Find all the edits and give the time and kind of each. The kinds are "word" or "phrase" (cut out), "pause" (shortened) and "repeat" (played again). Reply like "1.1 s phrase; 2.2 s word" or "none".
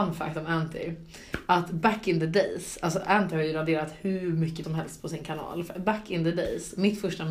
4.6 s word